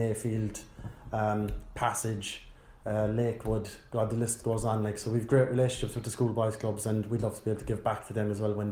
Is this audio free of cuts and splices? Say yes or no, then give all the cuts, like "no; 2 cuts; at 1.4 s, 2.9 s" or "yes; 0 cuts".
yes; 0 cuts